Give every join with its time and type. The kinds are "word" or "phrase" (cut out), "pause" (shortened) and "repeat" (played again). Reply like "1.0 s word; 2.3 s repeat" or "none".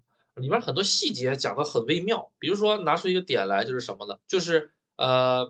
4.2 s pause